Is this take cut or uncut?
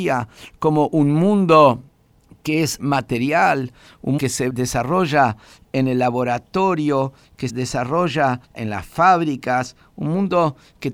cut